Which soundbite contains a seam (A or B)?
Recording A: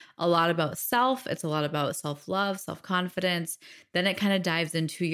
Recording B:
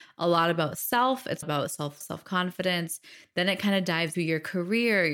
B